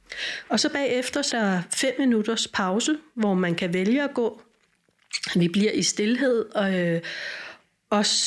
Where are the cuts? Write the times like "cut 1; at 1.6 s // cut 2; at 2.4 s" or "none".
cut 1; at 1.3 s